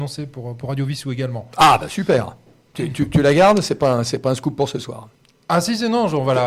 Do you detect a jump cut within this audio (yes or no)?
no